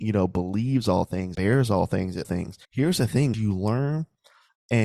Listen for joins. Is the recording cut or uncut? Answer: cut